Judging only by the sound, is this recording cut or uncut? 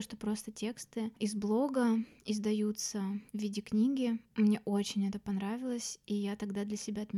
cut